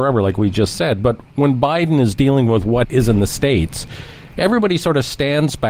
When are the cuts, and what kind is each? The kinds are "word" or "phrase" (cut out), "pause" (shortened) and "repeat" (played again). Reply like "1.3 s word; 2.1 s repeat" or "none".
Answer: 2.8 s word